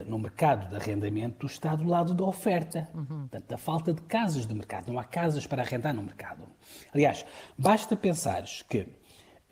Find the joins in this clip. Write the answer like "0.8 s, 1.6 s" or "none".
none